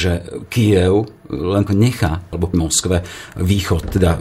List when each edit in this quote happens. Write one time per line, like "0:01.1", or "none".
0:01.7
0:02.5